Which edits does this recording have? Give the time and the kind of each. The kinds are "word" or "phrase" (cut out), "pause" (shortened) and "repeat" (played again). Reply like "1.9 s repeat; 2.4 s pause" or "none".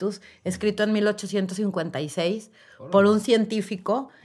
none